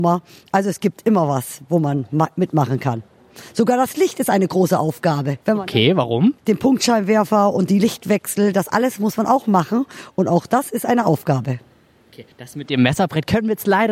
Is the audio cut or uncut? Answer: cut